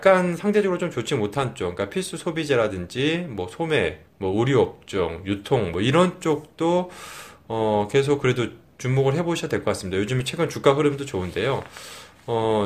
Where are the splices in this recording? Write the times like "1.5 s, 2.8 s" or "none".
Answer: 4.1 s